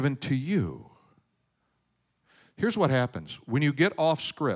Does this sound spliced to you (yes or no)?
no